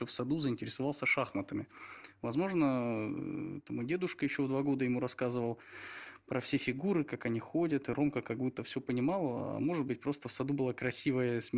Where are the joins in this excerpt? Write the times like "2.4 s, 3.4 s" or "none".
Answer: none